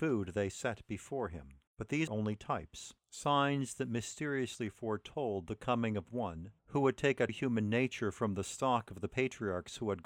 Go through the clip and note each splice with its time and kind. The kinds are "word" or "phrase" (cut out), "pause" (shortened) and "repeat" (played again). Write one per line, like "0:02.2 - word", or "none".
0:01.7 - pause
0:02.1 - phrase
0:03.0 - pause
0:06.6 - pause
0:07.3 - word